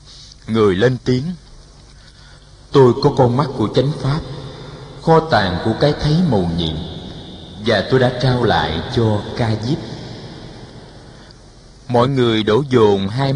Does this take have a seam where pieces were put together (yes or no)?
no